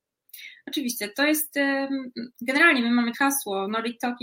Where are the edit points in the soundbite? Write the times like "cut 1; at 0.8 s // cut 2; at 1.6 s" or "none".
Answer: cut 1; at 3.1 s